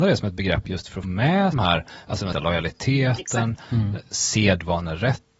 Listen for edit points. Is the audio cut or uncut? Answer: cut